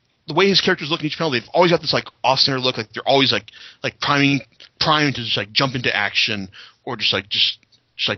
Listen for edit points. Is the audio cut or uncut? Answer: uncut